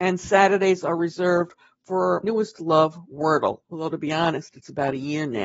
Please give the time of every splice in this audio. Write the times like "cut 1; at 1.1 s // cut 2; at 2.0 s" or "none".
cut 1; at 2.2 s // cut 2; at 3.6 s

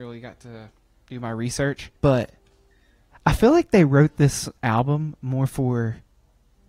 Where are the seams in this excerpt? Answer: cut 1; at 2.0 s // cut 2; at 4.6 s

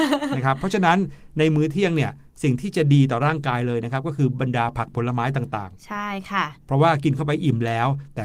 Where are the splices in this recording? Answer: cut 1; at 6.6 s

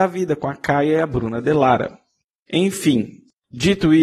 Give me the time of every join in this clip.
none

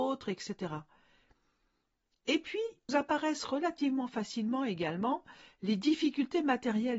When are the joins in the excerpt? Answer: cut 1; at 2.9 s

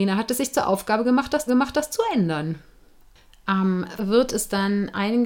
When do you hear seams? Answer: cut 1; at 1.5 s // cut 2; at 4.0 s

